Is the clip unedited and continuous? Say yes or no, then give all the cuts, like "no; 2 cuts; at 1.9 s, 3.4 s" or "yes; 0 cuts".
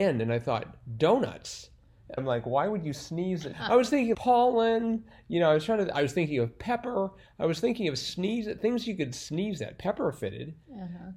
no; 3 cuts; at 2.2 s, 3.5 s, 4.1 s